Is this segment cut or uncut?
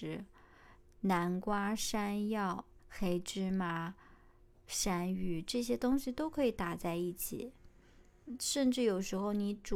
cut